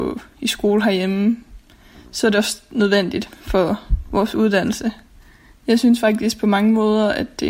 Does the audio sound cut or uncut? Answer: uncut